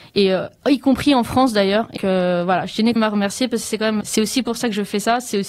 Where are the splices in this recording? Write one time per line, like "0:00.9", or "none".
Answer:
0:02.0
0:03.0
0:04.0